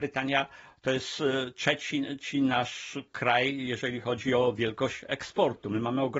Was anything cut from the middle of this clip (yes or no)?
no